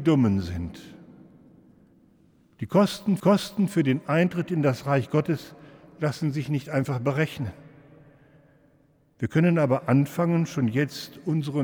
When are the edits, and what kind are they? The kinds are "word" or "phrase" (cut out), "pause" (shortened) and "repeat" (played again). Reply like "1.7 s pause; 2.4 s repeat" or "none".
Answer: 3.2 s repeat